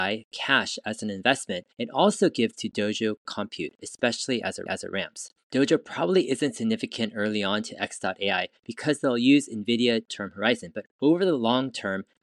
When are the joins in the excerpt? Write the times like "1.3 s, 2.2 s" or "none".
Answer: 1.7 s, 2.5 s, 4.7 s, 8.6 s, 10.1 s, 10.9 s